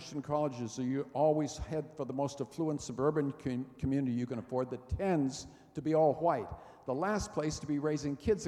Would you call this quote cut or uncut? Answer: uncut